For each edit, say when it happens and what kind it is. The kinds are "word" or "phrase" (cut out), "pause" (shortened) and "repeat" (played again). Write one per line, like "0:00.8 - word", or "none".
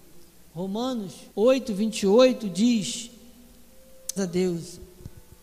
0:01.3 - pause
0:04.2 - word